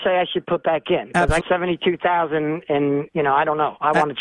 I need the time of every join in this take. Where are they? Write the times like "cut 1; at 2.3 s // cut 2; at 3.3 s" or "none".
cut 1; at 1.4 s